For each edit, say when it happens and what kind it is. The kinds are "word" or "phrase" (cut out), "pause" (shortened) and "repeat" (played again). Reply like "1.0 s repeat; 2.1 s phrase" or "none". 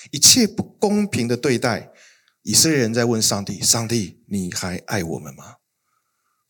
none